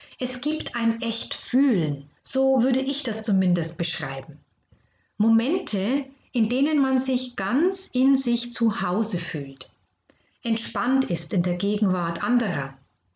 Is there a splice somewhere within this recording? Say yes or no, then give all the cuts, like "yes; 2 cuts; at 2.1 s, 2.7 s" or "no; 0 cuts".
yes; 1 cut; at 2.2 s